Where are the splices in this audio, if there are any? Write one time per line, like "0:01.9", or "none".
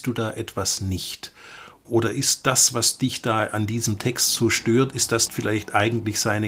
0:05.3